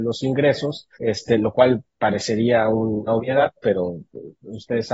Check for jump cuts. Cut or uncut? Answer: cut